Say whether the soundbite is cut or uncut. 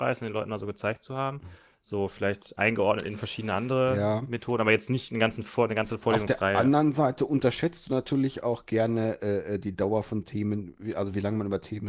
uncut